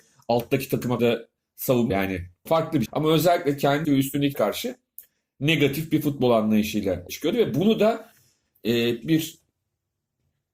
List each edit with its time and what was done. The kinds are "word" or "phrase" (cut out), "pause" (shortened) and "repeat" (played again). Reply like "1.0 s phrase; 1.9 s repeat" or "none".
1.0 s word; 1.9 s word; 2.5 s word; 2.9 s word; 3.8 s word; 4.3 s word; 7.1 s word; 9.0 s word